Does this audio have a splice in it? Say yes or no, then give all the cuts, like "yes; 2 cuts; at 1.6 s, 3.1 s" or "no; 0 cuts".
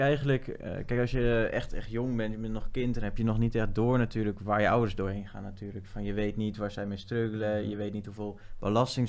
no; 0 cuts